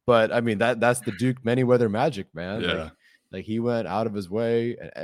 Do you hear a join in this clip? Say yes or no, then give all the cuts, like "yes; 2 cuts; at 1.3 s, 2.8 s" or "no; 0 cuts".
no; 0 cuts